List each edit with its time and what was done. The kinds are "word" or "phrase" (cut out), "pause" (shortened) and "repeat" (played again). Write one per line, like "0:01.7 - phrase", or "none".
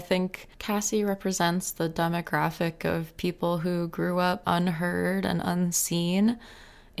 0:04.4 - word